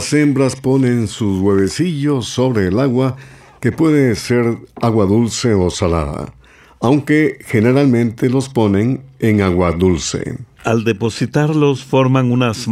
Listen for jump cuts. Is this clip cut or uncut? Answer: uncut